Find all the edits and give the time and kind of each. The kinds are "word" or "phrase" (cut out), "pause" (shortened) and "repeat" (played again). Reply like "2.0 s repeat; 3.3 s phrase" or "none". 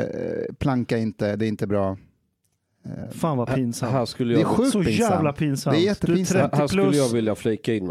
none